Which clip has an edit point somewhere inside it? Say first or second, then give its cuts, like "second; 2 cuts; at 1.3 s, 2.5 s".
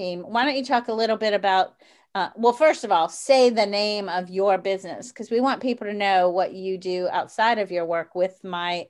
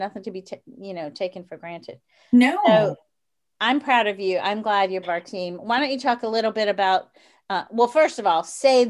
second; 1 cut; at 5.0 s